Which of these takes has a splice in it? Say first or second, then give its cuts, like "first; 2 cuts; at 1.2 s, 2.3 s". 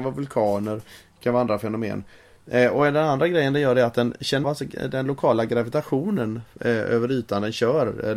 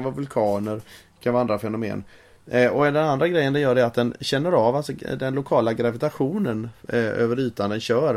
first; 1 cut; at 4.4 s